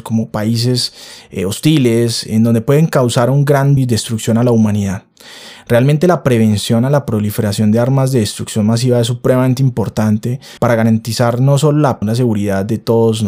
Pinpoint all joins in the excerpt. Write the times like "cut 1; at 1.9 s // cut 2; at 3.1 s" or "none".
cut 1; at 3.8 s // cut 2; at 10.6 s // cut 3; at 12.0 s